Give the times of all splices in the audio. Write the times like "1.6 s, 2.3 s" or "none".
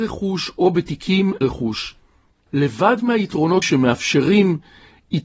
1.4 s, 3.6 s